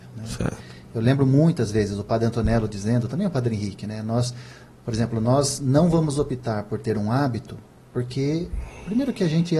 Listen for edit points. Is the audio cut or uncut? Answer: uncut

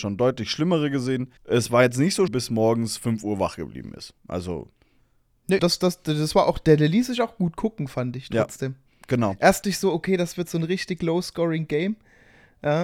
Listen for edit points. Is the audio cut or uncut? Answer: cut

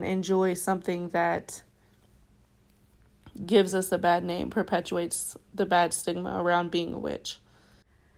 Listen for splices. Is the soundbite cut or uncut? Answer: uncut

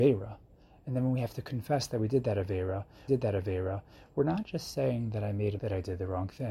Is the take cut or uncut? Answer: cut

